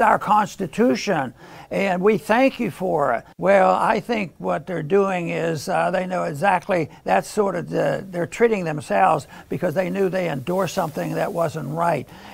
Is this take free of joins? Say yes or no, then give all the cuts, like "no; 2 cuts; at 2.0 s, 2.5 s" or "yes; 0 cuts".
no; 1 cut; at 3.3 s